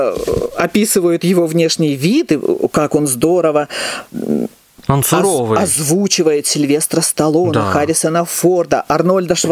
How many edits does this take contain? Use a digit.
0